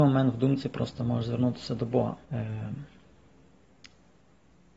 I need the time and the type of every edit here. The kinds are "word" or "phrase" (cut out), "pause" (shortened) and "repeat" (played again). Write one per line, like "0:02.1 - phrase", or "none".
0:02.2 - pause